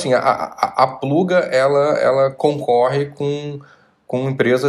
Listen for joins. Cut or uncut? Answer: uncut